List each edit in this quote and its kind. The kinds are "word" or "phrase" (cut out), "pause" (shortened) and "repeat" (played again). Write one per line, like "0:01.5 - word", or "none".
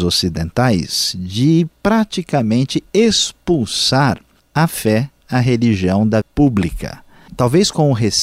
0:06.2 - word